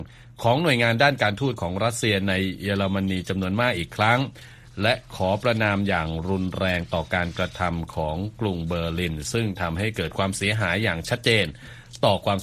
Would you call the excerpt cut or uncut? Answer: uncut